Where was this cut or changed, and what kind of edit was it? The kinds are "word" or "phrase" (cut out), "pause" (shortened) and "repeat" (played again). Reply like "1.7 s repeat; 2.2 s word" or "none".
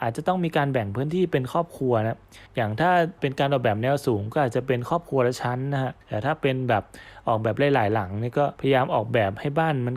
2.5 s pause; 6.0 s pause